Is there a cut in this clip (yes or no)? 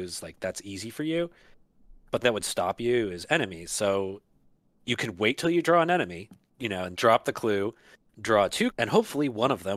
yes